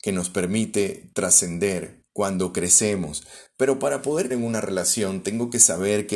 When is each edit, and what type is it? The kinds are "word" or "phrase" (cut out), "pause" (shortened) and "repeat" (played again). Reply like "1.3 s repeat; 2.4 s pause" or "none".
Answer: 2.1 s pause; 4.3 s word